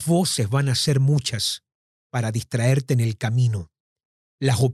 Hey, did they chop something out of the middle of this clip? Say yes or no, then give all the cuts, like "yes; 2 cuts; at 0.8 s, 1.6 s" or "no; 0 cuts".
no; 0 cuts